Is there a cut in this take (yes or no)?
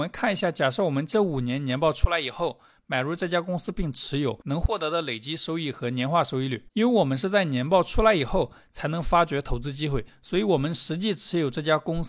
yes